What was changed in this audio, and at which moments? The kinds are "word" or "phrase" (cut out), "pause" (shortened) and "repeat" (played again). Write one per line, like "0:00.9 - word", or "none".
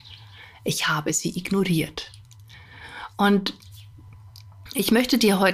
none